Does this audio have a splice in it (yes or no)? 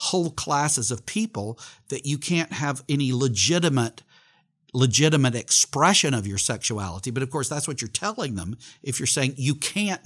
no